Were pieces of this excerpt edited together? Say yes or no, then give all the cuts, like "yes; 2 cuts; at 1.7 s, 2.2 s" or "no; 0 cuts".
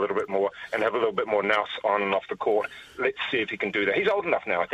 no; 0 cuts